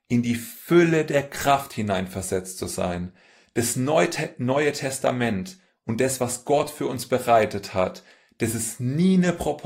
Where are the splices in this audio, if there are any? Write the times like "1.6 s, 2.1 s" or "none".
none